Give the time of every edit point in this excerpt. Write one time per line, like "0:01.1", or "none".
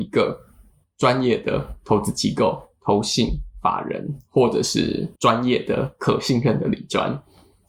0:05.2